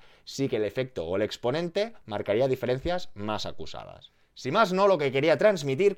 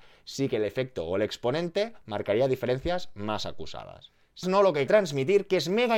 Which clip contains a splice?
second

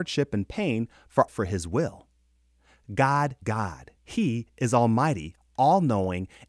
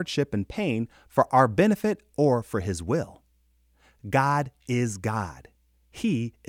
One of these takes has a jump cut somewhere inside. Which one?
first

